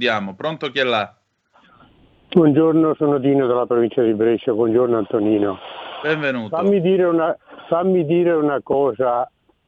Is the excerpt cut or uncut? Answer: uncut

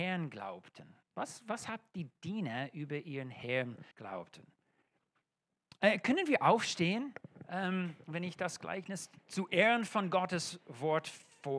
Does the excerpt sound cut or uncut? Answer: cut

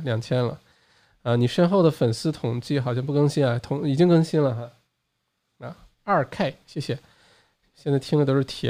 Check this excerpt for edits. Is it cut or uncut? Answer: uncut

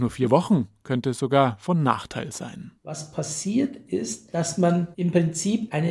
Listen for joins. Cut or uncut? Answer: cut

